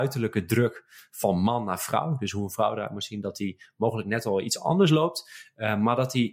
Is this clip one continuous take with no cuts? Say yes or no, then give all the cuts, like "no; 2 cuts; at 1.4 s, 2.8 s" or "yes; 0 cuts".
yes; 0 cuts